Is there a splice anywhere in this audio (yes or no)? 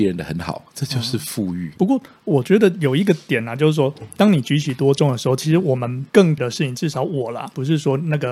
yes